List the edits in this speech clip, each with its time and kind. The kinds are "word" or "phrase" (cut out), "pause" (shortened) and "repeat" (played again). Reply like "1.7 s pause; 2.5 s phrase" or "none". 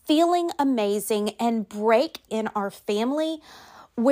2.3 s phrase